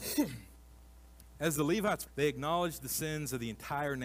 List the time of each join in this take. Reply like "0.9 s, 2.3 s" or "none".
2.1 s